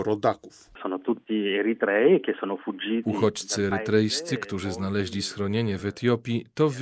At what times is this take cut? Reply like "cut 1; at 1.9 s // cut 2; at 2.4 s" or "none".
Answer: none